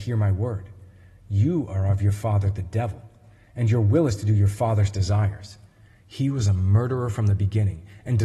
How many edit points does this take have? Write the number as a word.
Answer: zero